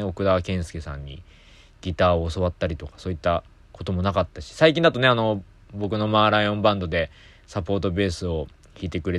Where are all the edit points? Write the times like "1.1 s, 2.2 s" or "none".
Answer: none